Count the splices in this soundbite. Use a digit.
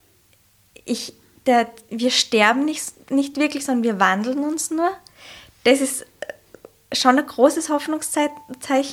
0